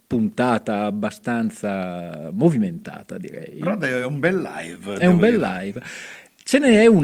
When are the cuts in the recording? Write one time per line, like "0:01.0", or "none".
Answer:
none